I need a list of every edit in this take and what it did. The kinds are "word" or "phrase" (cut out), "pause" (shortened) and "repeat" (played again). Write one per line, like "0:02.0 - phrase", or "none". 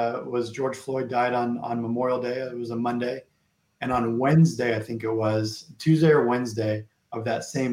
none